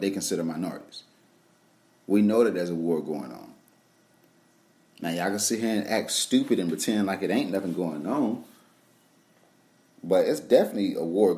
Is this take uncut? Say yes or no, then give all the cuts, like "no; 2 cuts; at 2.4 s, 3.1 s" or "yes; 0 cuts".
yes; 0 cuts